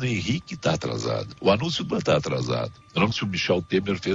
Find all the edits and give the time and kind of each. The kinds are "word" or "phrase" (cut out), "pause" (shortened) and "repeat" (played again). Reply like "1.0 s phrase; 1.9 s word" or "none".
1.9 s word; 2.8 s pause; 3.1 s word